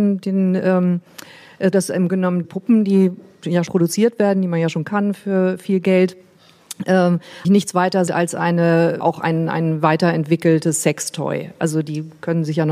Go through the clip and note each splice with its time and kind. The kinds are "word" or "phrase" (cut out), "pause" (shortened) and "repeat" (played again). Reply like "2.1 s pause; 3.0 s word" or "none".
1.7 s word; 2.1 s word; 2.4 s word; 3.7 s word; 4.8 s word; 7.4 s word; 8.1 s word; 9.0 s word